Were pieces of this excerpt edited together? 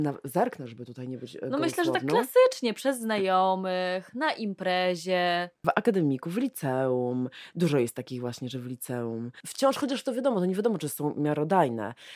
yes; 1 cut; at 5.6 s

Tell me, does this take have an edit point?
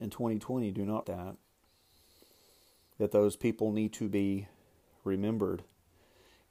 yes; 1 cut; at 1.0 s

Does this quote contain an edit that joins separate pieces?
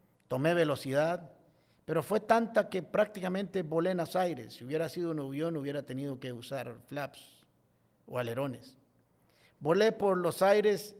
no; 0 cuts

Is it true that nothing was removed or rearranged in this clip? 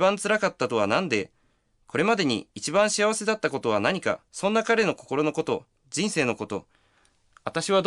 no; 1 cut; at 4.3 s

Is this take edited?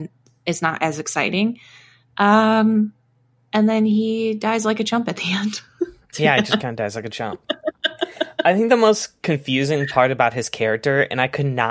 no; 0 cuts

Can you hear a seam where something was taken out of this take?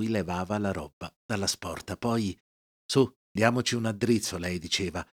no; 0 cuts

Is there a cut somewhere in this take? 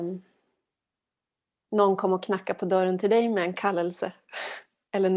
no; 0 cuts

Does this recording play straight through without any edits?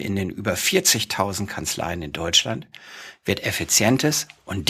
yes; 0 cuts

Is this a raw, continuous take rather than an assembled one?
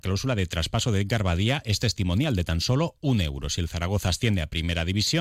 yes; 0 cuts

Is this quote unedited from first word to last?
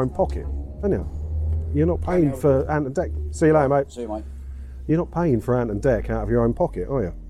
yes; 0 cuts

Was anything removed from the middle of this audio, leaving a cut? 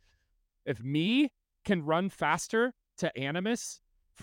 no; 0 cuts

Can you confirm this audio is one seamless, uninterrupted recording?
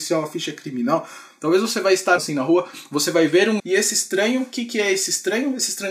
no; 2 cuts; at 2.2 s, 3.6 s

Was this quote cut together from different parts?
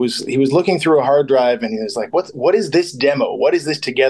no; 0 cuts

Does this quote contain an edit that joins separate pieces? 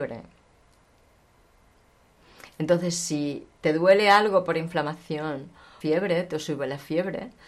yes; 2 cuts; at 3.5 s, 5.8 s

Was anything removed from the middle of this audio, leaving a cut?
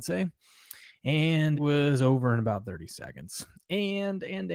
yes; 1 cut; at 1.5 s

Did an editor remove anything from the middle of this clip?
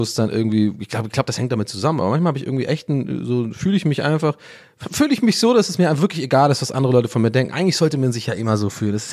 no; 0 cuts

